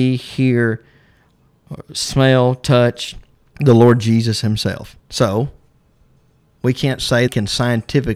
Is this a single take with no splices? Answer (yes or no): no